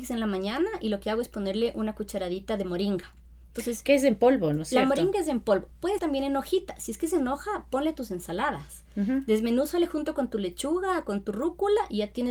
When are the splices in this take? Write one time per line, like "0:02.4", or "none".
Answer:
0:06.0